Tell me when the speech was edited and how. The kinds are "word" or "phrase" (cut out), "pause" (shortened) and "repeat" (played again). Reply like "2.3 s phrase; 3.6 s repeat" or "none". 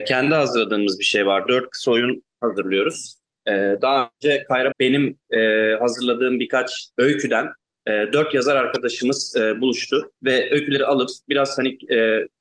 2.3 s pause; 4.7 s phrase; 6.9 s pause; 10.1 s pause